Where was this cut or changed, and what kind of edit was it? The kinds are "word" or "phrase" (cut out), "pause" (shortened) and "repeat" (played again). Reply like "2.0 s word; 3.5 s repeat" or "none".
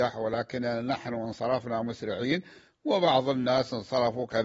none